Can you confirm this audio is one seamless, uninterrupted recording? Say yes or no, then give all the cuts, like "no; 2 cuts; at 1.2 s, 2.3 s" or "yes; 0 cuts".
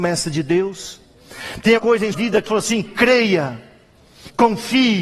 no; 4 cuts; at 1.8 s, 2.1 s, 2.5 s, 2.8 s